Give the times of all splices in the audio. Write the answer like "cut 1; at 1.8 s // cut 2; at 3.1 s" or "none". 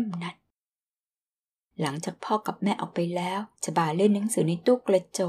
cut 1; at 3.6 s

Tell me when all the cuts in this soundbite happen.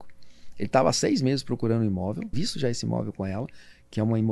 cut 1; at 2.3 s

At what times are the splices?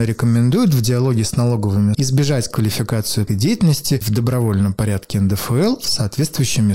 cut 1; at 1.9 s // cut 2; at 3.3 s // cut 3; at 4.0 s

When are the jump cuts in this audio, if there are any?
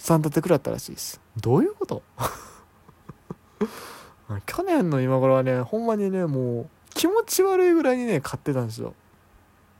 cut 1; at 1.3 s // cut 2; at 6.8 s

